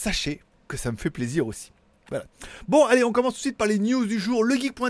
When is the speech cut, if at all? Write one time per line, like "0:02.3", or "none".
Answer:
none